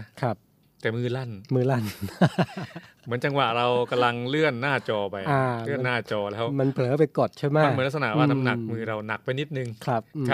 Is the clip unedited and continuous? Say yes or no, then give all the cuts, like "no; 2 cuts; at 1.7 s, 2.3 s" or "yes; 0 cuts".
yes; 0 cuts